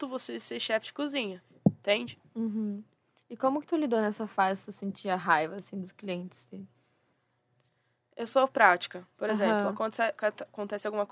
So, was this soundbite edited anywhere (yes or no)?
no